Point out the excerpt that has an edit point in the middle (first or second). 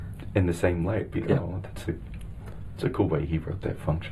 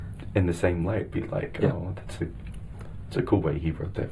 first